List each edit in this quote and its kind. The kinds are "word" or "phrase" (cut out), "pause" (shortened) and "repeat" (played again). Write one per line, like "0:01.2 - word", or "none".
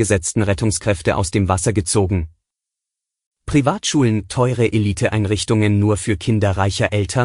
0:02.6 - pause